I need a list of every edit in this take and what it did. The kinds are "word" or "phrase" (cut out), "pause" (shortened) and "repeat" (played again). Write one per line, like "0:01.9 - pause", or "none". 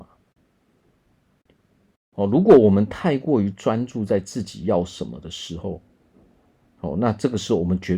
none